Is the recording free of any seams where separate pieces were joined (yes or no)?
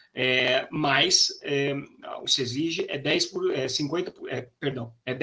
no